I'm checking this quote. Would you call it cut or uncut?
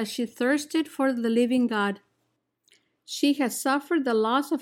uncut